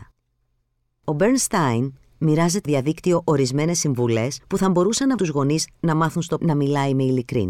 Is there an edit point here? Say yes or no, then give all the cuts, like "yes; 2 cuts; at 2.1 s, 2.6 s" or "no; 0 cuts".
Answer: yes; 4 cuts; at 2.7 s, 4.4 s, 5.2 s, 6.4 s